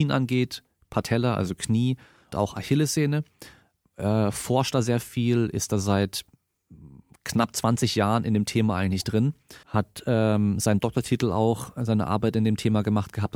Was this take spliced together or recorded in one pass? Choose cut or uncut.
cut